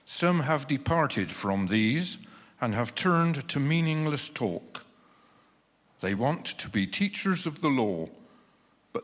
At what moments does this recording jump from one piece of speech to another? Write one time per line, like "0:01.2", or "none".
none